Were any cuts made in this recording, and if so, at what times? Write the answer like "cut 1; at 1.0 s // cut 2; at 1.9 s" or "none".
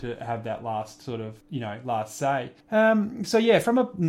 cut 1; at 1.4 s // cut 2; at 2.6 s